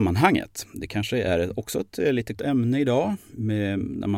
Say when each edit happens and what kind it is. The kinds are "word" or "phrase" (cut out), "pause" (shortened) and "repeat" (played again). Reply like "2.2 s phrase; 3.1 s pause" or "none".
2.3 s word